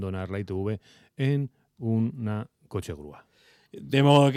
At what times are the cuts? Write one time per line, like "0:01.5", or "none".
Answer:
none